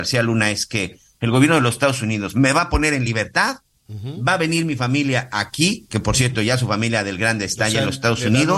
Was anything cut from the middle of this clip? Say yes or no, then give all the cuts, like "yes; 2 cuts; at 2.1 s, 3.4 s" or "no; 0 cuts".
no; 0 cuts